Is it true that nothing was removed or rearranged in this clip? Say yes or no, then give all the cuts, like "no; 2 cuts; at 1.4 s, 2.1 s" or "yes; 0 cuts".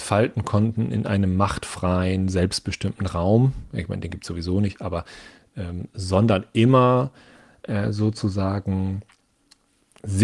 yes; 0 cuts